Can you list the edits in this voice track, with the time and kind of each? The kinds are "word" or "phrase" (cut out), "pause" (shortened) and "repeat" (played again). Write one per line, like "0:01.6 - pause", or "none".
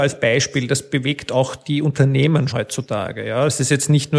0:02.5 - word